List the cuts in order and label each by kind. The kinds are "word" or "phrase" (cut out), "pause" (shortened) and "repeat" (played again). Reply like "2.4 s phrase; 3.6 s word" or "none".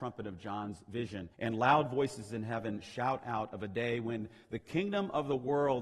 1.3 s pause